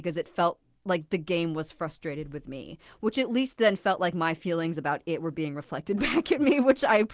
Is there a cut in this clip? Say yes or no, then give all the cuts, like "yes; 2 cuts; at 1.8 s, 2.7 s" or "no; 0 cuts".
no; 0 cuts